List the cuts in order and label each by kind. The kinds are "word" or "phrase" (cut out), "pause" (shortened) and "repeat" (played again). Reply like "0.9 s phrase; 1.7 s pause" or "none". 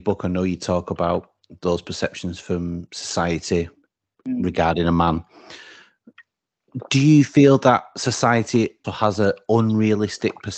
8.8 s word

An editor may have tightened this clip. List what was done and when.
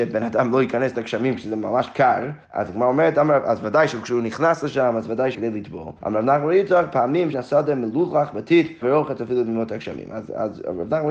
0.9 s phrase; 2.4 s pause; 5.3 s phrase; 6.0 s pause; 7.3 s phrase; 8.8 s word

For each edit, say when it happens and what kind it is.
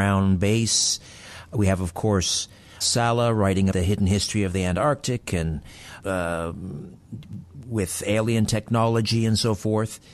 2.8 s word; 3.7 s word; 6.0 s word

